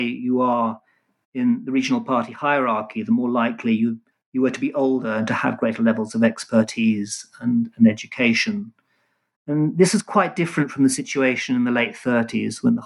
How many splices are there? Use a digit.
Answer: 1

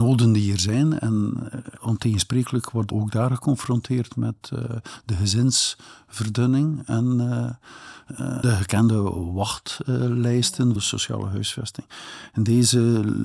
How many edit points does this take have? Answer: 4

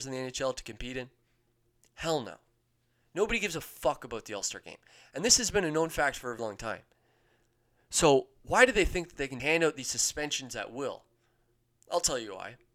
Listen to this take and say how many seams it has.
2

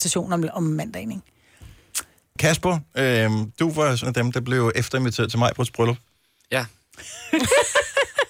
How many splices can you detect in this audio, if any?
1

